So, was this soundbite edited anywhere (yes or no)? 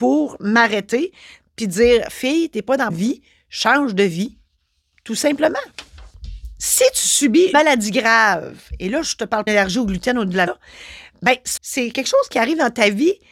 yes